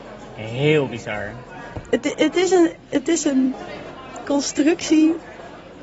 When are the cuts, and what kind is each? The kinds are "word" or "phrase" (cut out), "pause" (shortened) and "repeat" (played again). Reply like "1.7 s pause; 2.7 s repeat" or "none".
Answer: 4.2 s word